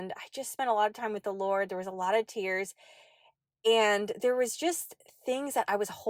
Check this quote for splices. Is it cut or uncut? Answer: uncut